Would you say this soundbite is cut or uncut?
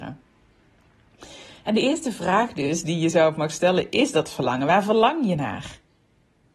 uncut